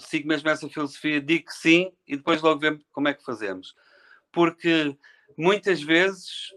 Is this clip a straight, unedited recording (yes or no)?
yes